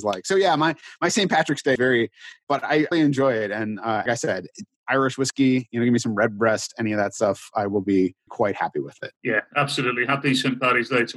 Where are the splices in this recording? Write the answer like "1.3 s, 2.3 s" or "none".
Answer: 1.8 s, 2.5 s, 2.9 s, 4.1 s, 8.3 s, 9.2 s